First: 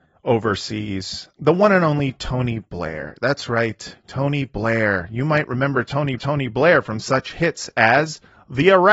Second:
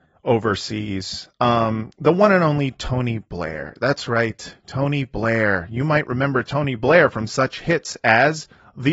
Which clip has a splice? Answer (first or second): first